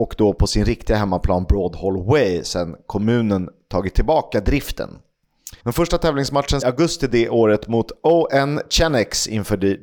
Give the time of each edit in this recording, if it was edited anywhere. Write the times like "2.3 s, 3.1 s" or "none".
5.6 s, 6.6 s